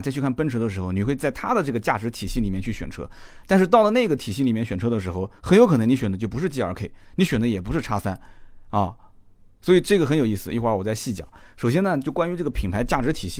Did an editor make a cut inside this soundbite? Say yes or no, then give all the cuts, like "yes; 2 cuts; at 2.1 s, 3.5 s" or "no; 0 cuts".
no; 0 cuts